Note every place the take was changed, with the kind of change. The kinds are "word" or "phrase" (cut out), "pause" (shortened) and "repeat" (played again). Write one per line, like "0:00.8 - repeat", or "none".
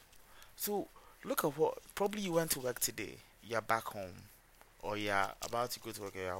0:03.3 - pause